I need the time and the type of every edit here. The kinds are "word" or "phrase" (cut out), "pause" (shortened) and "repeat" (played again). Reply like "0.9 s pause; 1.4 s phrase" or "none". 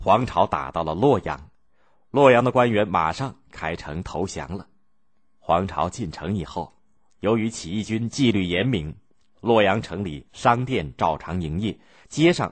10.3 s pause